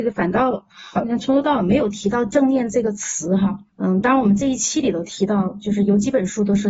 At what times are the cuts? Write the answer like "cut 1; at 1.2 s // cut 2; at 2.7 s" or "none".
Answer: cut 1; at 3.7 s